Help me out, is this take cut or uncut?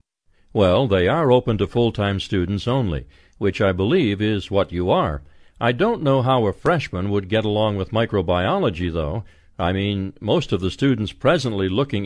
uncut